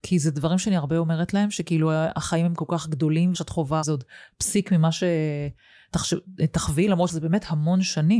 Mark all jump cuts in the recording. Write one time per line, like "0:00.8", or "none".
0:03.3
0:03.8
0:07.1